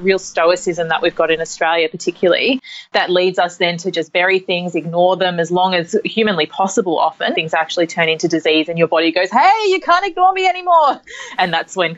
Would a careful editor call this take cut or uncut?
cut